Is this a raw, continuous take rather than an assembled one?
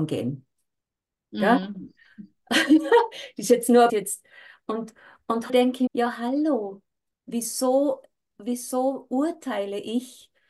no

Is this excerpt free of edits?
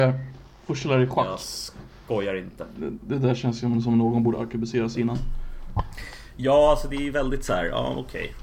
yes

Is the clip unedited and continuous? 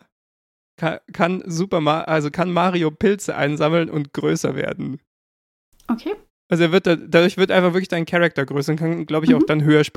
yes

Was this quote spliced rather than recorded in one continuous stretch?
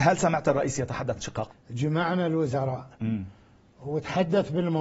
yes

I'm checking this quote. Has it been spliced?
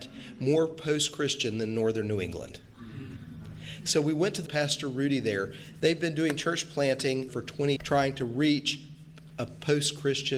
yes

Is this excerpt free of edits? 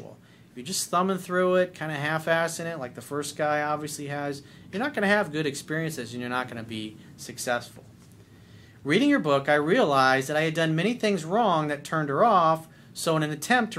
yes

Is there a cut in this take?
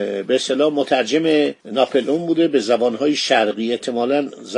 yes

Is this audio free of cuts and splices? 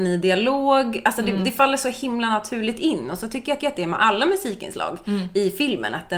no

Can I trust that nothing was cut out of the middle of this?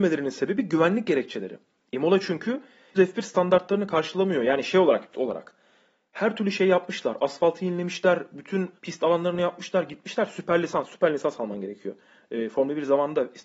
no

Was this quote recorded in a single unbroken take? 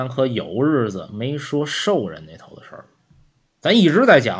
yes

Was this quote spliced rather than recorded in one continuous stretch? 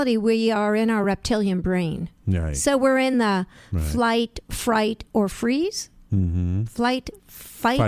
no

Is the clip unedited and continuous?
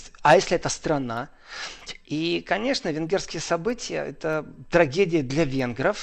yes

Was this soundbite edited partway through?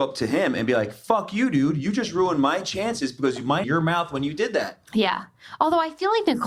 yes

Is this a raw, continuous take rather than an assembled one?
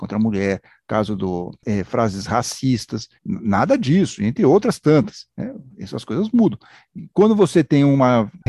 no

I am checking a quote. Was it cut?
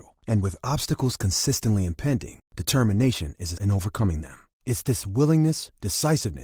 yes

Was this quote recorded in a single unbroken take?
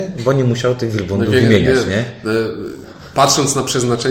yes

